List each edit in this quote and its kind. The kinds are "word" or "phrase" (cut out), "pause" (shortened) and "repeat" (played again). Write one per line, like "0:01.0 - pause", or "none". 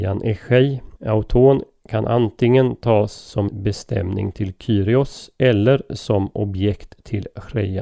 0:01.0 - pause
0:03.5 - word